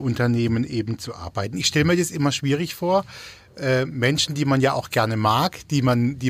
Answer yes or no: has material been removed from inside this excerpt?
no